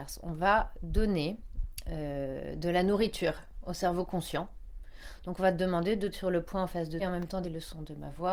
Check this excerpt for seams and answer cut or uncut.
cut